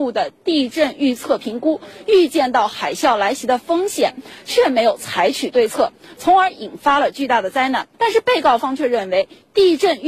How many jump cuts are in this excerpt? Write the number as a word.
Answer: one